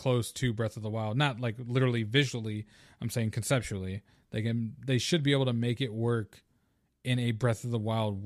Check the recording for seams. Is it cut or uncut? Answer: uncut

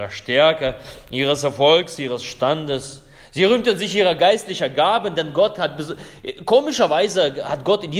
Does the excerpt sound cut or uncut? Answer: uncut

